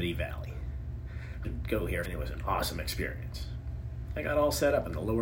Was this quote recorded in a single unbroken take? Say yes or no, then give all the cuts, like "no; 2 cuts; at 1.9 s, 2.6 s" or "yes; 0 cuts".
no; 2 cuts; at 1.4 s, 2.0 s